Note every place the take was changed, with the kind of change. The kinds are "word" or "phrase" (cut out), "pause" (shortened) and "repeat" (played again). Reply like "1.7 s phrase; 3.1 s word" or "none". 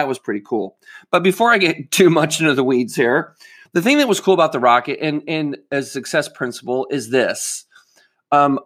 3.7 s word